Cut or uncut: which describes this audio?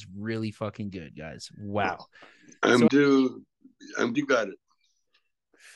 cut